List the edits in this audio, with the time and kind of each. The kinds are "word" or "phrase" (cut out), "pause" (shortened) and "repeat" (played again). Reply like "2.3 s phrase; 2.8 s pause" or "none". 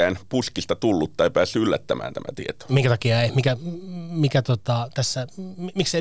none